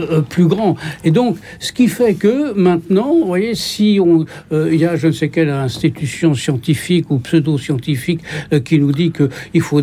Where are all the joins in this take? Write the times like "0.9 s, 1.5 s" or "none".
none